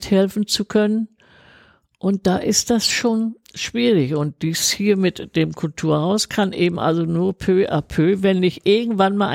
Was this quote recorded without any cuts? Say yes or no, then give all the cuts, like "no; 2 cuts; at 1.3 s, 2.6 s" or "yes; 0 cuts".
yes; 0 cuts